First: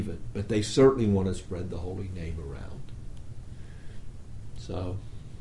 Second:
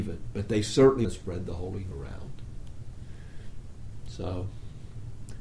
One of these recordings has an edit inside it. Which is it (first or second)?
second